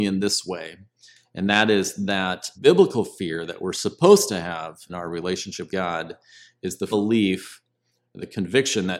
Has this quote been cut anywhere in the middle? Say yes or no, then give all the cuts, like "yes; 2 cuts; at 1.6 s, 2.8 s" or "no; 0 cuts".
yes; 4 cuts; at 2.6 s, 4.9 s, 5.7 s, 6.9 s